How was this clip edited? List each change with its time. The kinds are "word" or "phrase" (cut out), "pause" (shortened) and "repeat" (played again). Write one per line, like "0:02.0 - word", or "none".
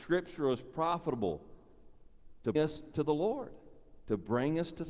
0:02.5 - word
0:04.0 - pause